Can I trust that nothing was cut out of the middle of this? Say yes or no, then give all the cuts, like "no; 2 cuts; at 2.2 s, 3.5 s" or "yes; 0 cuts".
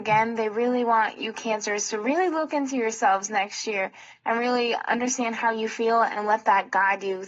yes; 0 cuts